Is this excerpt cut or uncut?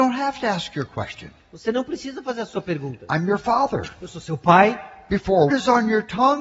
cut